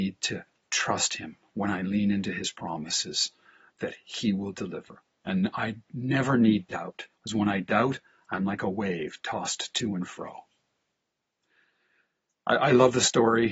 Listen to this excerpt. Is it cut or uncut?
cut